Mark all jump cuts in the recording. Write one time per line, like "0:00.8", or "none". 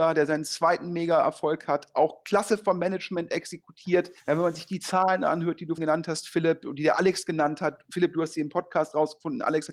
0:04.2
0:05.8